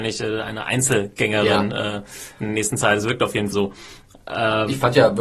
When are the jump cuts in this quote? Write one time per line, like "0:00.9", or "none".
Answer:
0:03.5